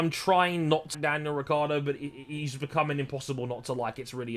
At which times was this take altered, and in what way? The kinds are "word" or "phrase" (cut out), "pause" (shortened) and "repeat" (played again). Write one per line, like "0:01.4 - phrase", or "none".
0:00.9 - word